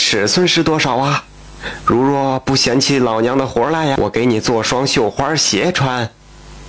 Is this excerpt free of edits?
no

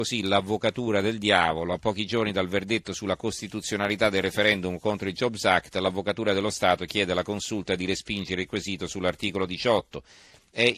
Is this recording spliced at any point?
no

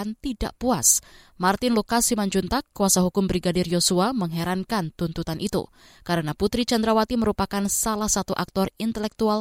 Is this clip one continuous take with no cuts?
yes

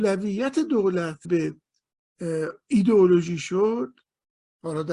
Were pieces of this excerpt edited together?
yes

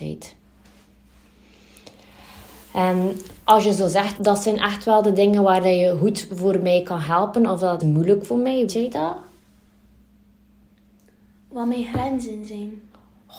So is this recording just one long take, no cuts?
no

